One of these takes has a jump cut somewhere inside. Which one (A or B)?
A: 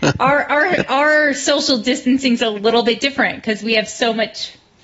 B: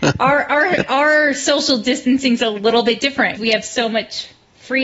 B